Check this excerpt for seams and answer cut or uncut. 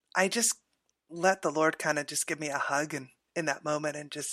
uncut